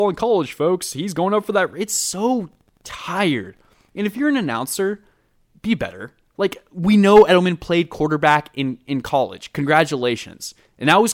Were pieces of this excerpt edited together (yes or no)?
no